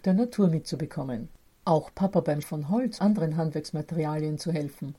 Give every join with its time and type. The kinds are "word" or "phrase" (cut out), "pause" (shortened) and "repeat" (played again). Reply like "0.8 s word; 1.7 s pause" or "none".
1.4 s pause; 2.4 s word; 3.0 s word